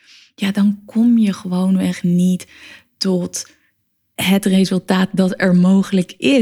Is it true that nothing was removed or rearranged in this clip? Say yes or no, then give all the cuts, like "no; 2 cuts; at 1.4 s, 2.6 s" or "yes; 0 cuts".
yes; 0 cuts